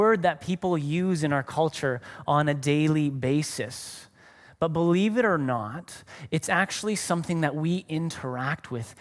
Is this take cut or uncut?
uncut